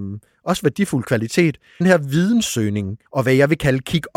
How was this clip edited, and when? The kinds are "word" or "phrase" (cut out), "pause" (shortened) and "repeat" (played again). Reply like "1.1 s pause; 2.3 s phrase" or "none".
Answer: 1.8 s phrase; 3.1 s pause